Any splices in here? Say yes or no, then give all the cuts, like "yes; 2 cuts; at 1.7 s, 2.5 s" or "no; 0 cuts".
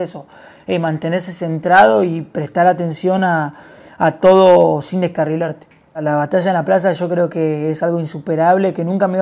no; 0 cuts